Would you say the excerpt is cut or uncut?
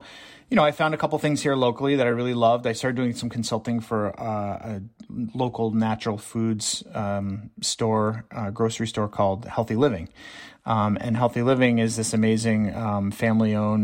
uncut